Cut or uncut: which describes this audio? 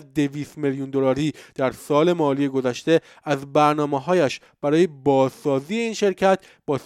uncut